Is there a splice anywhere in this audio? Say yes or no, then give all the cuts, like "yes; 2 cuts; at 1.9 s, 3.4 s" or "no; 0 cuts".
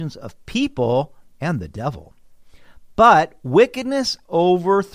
no; 0 cuts